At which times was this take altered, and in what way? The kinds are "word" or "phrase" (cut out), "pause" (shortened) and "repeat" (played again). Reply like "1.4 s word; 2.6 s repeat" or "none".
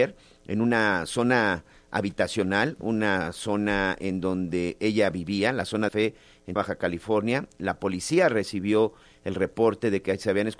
5.9 s phrase; 6.6 s word